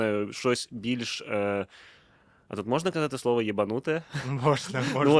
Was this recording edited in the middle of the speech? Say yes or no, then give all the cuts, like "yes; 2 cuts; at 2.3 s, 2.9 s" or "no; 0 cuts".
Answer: no; 0 cuts